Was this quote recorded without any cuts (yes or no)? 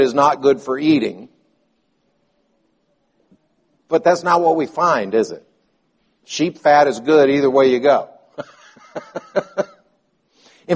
yes